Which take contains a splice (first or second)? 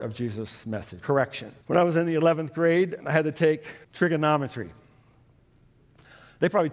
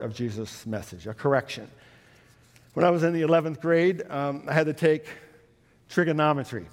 first